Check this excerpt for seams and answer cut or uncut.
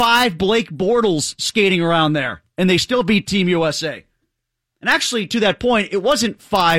uncut